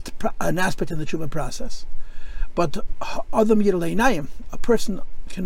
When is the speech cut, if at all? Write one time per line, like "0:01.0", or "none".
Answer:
none